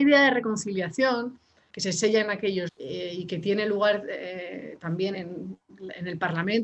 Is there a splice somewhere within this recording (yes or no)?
yes